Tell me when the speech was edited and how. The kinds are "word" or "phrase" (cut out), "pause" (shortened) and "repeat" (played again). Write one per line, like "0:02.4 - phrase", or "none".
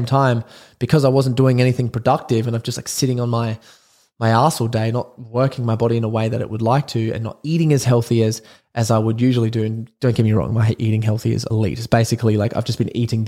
none